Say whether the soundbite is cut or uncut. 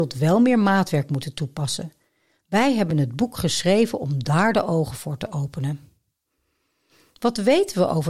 uncut